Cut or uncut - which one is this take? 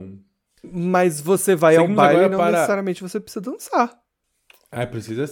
uncut